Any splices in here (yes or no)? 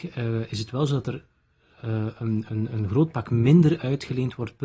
no